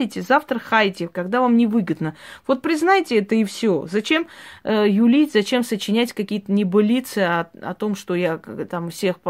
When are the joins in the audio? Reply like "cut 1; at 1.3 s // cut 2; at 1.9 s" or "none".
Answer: none